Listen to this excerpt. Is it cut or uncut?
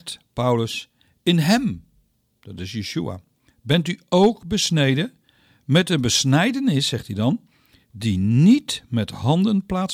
uncut